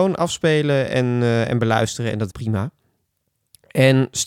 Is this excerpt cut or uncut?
cut